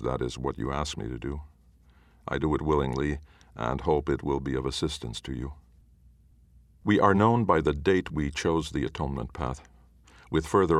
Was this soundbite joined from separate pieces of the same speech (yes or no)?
no